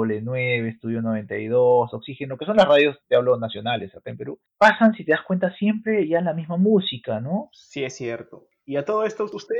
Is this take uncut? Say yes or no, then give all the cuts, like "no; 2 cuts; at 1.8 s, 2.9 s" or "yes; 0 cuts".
yes; 0 cuts